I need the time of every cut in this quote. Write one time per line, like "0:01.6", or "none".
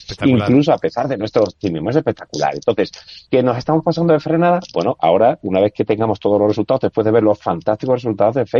0:03.3